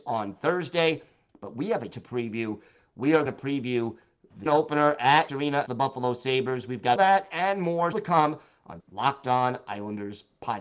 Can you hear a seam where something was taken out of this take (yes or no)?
yes